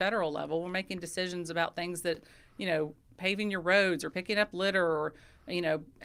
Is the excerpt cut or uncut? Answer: uncut